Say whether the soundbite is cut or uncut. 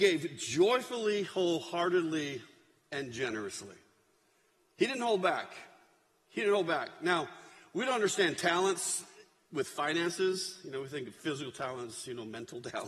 uncut